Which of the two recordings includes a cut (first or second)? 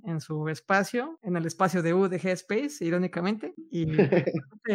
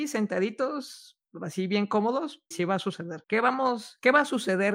second